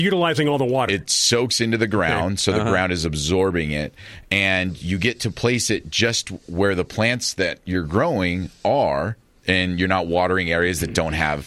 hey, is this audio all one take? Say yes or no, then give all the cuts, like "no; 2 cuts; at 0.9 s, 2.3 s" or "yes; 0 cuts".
yes; 0 cuts